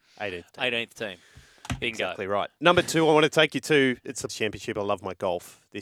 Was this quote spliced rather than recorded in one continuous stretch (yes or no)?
yes